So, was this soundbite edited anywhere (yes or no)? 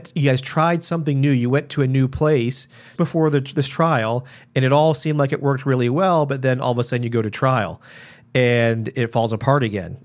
yes